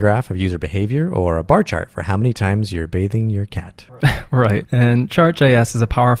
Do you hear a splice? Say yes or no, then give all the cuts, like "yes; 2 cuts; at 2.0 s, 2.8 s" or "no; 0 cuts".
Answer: no; 0 cuts